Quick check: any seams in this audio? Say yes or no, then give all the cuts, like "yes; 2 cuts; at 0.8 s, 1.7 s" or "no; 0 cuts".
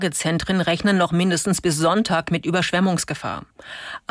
no; 0 cuts